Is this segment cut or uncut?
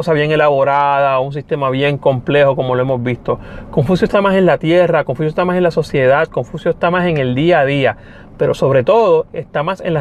uncut